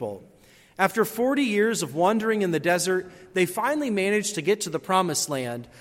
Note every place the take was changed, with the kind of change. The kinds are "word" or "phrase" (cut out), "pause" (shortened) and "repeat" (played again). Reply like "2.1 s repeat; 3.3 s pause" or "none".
none